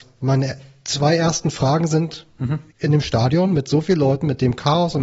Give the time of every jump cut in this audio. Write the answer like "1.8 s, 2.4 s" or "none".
2.7 s